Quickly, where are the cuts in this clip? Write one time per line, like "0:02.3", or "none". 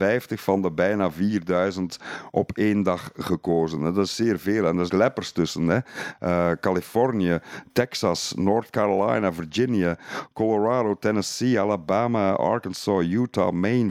0:04.9